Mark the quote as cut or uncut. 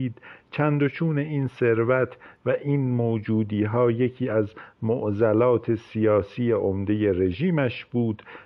uncut